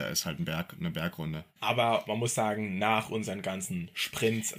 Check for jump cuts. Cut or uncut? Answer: uncut